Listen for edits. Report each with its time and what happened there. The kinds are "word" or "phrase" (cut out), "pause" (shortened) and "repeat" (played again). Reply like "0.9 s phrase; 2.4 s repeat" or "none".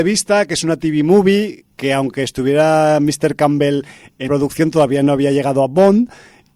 1.7 s pause; 4.3 s word